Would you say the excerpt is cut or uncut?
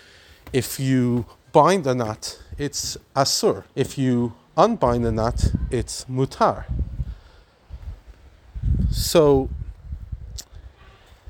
cut